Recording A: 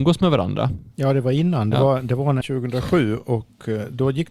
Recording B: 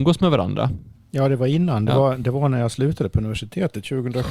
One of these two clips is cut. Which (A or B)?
A